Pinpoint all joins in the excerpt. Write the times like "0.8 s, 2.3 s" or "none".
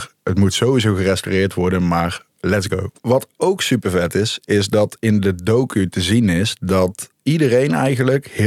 3.0 s, 7.1 s